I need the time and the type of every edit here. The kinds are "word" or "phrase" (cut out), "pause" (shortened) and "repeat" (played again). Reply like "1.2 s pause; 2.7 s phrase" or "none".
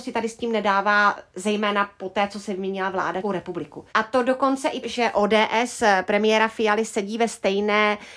3.2 s word; 3.9 s pause; 4.8 s word

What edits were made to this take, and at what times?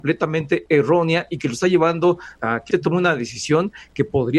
2.4 s word; 2.7 s word

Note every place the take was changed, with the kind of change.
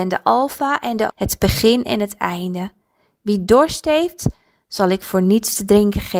1.1 s word

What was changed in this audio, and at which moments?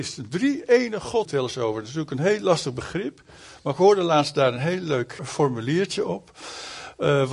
1.2 s word; 5.2 s word

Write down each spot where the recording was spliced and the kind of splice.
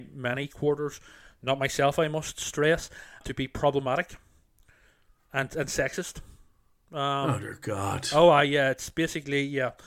3.2 s word

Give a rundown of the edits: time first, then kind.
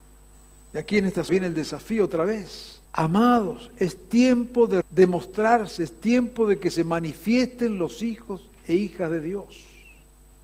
1.3 s phrase; 2.8 s pause; 4.8 s word

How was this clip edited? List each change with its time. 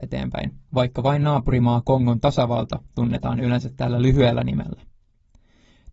none

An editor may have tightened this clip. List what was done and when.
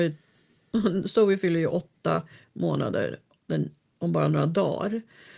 none

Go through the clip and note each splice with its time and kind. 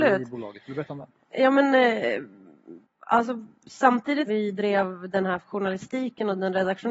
2.8 s pause; 4.3 s word; 5.4 s word

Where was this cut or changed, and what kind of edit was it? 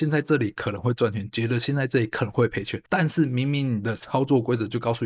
2.9 s pause

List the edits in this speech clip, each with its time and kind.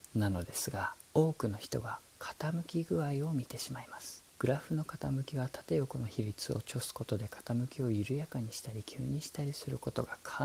1.1 s pause; 2.1 s pause; 4.3 s pause

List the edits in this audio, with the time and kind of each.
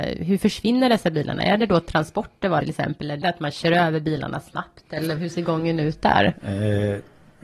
2.6 s phrase; 3.2 s word; 5.2 s word

